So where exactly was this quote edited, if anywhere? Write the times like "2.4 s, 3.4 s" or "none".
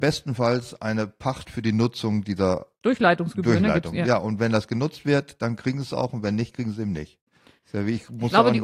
none